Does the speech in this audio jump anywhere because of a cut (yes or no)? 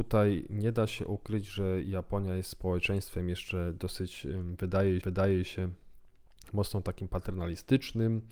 yes